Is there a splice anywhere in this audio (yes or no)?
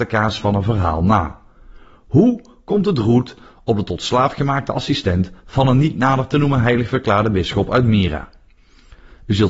no